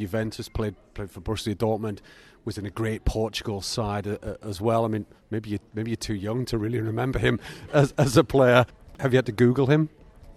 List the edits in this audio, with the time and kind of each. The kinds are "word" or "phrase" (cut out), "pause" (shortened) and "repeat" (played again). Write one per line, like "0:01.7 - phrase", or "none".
0:07.7 - word